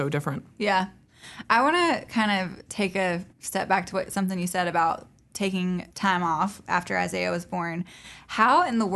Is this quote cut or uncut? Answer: cut